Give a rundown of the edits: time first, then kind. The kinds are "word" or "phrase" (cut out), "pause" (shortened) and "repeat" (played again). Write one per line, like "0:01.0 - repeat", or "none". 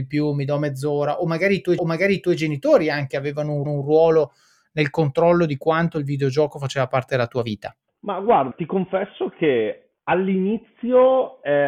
0:01.8 - repeat
0:03.7 - repeat
0:07.9 - pause
0:08.5 - word
0:10.0 - pause